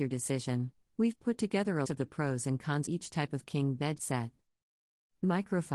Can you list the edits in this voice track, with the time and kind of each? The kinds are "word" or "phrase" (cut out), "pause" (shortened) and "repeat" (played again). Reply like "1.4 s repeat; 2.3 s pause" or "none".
1.8 s word; 2.9 s word; 4.0 s word